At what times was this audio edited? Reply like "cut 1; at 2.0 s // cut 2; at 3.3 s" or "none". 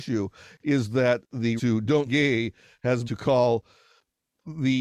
cut 1; at 1.6 s // cut 2; at 2.1 s // cut 3; at 3.1 s